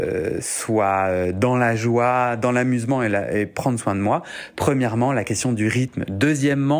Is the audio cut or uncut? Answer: uncut